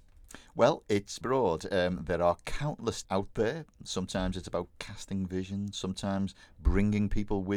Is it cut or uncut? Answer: cut